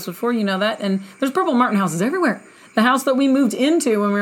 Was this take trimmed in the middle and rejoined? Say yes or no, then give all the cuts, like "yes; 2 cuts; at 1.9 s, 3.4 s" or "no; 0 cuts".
no; 0 cuts